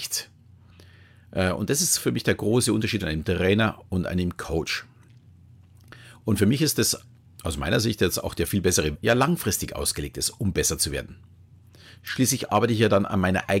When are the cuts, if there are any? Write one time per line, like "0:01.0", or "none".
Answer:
0:03.0
0:07.3
0:08.9